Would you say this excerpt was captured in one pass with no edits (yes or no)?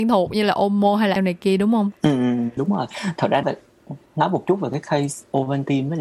no